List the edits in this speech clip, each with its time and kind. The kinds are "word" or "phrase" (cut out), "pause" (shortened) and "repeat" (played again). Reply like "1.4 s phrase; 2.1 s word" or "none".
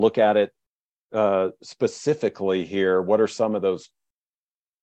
none